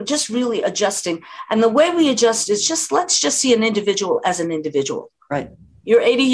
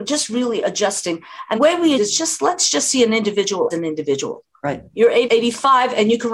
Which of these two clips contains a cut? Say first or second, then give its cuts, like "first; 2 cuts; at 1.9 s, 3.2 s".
second; 5 cuts; at 1.6 s, 2.0 s, 3.7 s, 4.9 s, 5.2 s